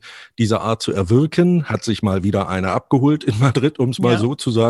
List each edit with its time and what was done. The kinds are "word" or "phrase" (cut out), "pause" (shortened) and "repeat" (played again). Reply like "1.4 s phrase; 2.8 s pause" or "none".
none